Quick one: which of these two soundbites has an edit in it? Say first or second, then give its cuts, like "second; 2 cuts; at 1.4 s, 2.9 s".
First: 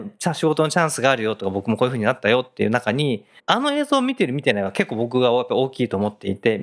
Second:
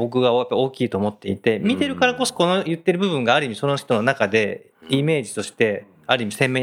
first; 1 cut; at 3.4 s